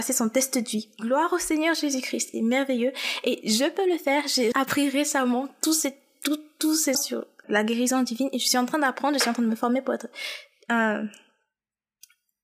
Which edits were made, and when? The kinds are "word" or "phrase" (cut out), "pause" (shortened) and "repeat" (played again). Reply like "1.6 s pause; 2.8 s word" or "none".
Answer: 2.3 s word; 4.5 s word; 6.9 s word; 7.4 s word